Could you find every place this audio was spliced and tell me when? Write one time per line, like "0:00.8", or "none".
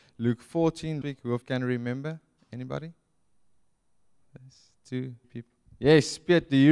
0:01.0
0:01.4
0:05.2